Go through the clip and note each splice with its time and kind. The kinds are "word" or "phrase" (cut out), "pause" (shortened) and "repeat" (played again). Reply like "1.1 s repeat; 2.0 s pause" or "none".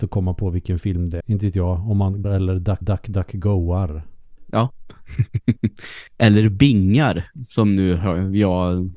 1.2 s phrase; 2.2 s word; 2.8 s repeat; 6.1 s pause